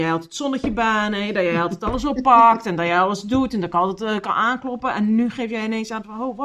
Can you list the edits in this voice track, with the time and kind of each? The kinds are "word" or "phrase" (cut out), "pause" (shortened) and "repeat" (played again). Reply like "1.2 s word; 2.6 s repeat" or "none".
none